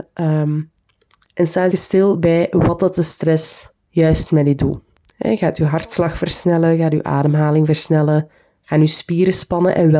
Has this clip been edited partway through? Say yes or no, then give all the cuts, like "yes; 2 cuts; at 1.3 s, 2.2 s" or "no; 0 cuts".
yes; 2 cuts; at 1.7 s, 3.8 s